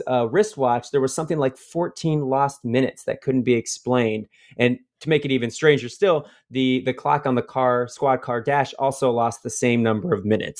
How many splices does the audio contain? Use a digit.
0